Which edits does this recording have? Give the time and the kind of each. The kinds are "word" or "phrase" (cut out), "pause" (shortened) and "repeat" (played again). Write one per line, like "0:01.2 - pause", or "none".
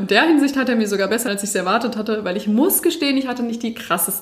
0:01.3 - word